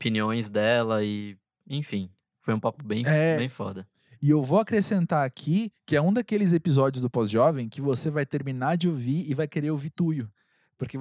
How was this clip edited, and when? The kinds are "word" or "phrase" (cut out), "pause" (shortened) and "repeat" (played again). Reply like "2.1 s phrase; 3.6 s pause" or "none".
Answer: none